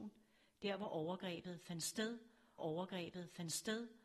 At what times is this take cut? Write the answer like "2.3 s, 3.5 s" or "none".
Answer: 2.6 s